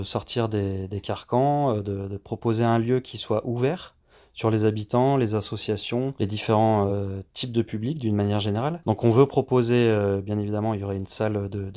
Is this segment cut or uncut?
uncut